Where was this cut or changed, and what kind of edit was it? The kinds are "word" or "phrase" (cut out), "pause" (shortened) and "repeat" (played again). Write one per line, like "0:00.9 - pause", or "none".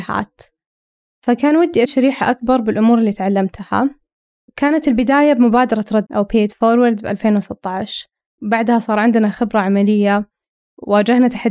0:01.9 - word
0:06.1 - word
0:08.4 - phrase